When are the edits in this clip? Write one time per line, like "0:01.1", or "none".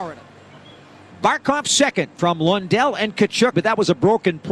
0:03.5